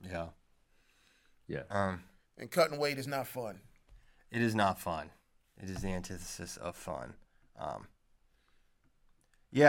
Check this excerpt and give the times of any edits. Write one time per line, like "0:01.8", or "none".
none